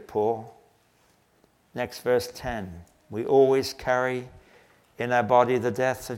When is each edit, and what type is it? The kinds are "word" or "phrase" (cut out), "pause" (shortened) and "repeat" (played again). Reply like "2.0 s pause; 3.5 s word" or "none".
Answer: none